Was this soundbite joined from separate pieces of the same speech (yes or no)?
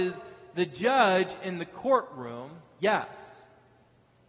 no